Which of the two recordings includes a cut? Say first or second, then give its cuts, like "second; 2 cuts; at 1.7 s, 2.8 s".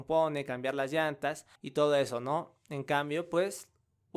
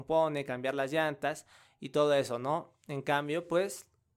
first; 1 cut; at 1.6 s